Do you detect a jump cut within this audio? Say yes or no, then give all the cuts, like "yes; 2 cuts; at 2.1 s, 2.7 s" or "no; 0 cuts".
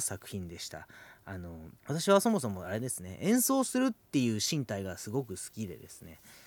yes; 1 cut; at 1.8 s